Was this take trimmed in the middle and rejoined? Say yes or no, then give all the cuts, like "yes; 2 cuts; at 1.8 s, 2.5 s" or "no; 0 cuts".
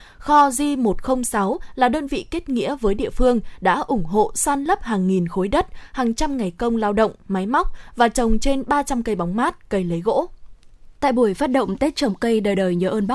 yes; 1 cut; at 10.9 s